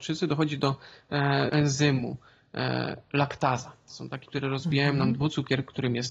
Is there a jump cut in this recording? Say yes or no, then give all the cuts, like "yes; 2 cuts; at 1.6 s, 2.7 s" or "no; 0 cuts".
yes; 2 cuts; at 1.5 s, 4.2 s